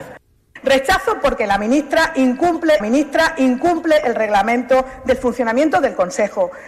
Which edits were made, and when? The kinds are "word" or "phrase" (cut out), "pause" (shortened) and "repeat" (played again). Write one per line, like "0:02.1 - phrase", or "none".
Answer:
0:02.8 - repeat